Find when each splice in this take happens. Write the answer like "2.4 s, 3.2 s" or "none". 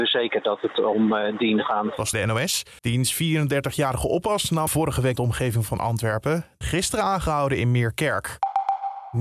2.1 s, 2.8 s, 4.7 s, 5.2 s, 6.6 s

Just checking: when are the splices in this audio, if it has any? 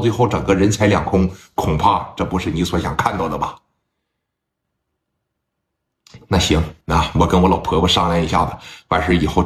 6.8 s

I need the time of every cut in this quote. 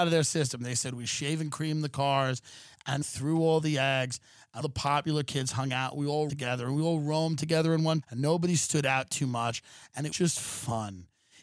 3.0 s, 4.6 s, 6.3 s, 8.0 s, 10.1 s

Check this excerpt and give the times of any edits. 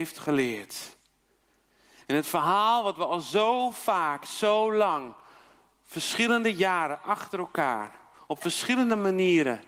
none

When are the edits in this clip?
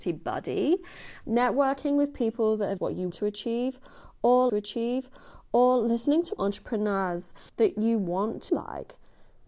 1.2 s, 2.8 s, 3.1 s, 4.5 s, 6.4 s, 7.5 s, 8.5 s

